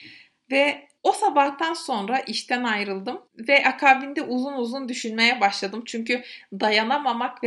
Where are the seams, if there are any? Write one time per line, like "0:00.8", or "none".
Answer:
0:01.0
0:03.3